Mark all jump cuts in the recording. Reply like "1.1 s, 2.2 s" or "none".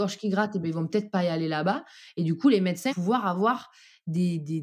2.9 s